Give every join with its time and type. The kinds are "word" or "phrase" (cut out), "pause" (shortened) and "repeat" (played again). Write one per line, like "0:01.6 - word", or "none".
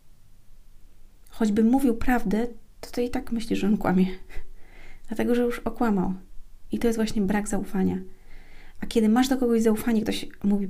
none